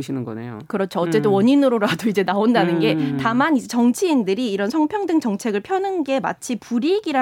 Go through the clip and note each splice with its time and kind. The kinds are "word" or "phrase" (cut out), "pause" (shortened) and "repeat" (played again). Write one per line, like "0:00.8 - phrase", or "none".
none